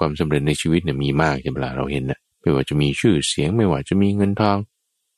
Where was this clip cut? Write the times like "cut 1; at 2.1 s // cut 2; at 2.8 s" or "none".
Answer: cut 1; at 2.3 s